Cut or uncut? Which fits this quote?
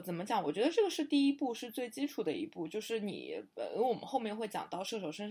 uncut